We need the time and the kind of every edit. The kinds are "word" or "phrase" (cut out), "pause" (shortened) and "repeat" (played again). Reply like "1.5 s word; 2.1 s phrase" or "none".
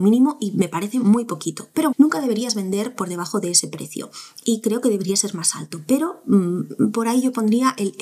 1.9 s word